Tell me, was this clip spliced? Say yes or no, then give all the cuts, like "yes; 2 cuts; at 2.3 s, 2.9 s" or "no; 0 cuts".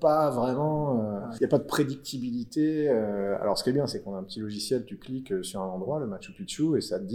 yes; 1 cut; at 1.4 s